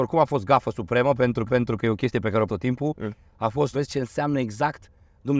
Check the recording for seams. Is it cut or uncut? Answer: cut